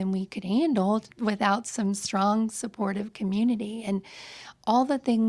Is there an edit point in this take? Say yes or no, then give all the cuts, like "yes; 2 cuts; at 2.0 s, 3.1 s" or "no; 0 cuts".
yes; 1 cut; at 1.1 s